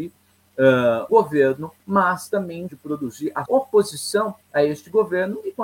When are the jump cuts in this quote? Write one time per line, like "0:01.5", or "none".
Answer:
0:01.1
0:01.8
0:02.7
0:03.5
0:04.4